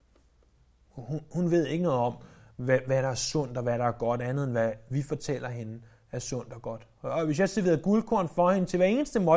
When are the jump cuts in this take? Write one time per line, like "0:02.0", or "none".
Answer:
none